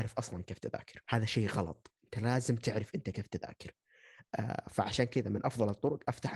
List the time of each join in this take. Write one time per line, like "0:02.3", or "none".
0:01.0
0:02.0